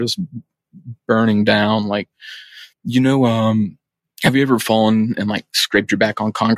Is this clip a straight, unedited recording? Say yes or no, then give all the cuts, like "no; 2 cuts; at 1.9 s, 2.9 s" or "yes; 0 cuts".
no; 2 cuts; at 2.7 s, 4.0 s